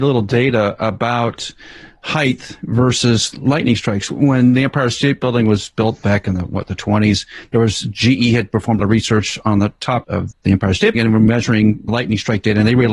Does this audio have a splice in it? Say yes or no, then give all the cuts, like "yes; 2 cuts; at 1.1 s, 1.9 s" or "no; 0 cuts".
yes; 3 cuts; at 8.8 s, 10.0 s, 10.9 s